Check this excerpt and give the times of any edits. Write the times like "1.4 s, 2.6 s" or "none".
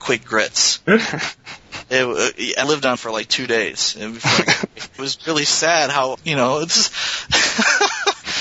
2.6 s, 3.0 s, 5.0 s, 6.1 s